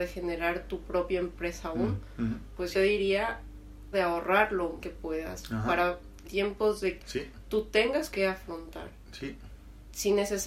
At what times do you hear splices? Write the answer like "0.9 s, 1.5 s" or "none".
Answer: 2.7 s, 3.9 s, 4.8 s, 6.2 s, 7.0 s, 8.1 s